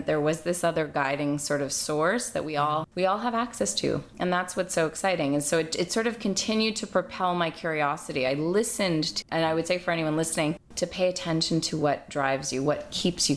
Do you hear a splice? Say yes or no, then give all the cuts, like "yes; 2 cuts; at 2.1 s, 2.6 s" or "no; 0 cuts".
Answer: no; 0 cuts